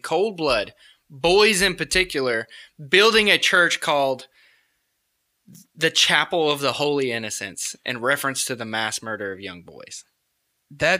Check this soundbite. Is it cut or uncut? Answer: uncut